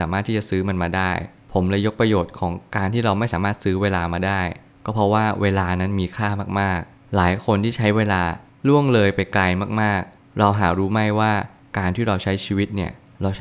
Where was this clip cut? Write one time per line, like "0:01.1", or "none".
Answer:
none